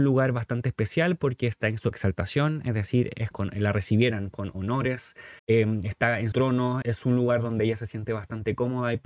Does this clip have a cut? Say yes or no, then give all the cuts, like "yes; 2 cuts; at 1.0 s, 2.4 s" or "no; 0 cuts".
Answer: yes; 4 cuts; at 3.3 s, 5.4 s, 6.3 s, 6.8 s